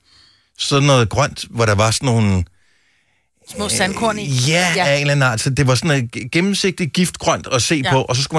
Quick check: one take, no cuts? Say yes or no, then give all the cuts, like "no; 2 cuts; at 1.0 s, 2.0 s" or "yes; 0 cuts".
yes; 0 cuts